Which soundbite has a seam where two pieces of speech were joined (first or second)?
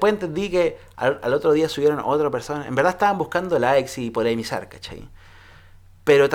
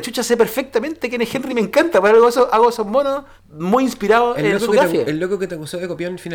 second